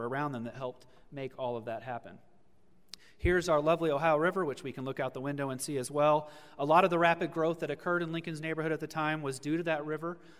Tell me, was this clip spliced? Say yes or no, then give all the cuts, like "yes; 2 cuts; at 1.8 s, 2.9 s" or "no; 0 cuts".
no; 0 cuts